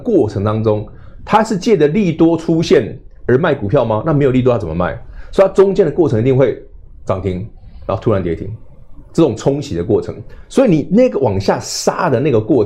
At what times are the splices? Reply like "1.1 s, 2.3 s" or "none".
none